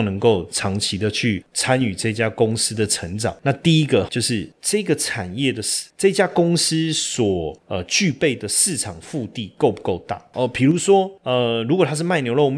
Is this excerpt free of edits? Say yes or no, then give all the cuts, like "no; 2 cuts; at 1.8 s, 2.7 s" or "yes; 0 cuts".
no; 1 cut; at 4.1 s